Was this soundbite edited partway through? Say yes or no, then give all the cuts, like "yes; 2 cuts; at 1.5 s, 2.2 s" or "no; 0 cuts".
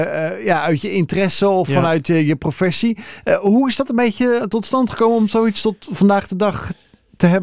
no; 0 cuts